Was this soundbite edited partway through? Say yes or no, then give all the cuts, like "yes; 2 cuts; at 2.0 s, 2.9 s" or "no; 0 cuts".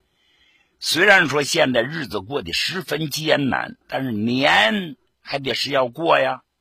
yes; 1 cut; at 3.8 s